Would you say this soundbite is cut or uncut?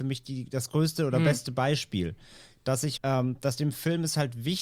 cut